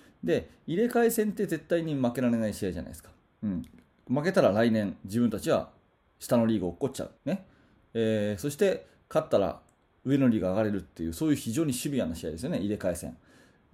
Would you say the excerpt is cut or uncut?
cut